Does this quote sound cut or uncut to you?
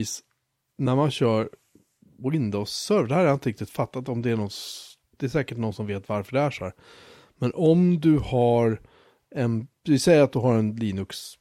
uncut